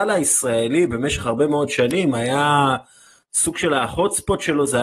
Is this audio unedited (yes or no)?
yes